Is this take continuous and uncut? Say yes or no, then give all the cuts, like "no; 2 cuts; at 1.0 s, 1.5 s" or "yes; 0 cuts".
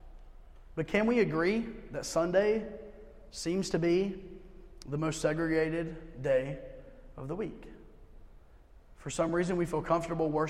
yes; 0 cuts